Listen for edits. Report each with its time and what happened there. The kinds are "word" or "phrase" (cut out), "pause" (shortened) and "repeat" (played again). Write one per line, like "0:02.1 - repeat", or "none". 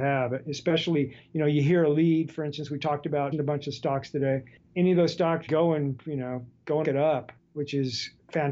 0:03.3 - word
0:05.5 - word
0:06.8 - word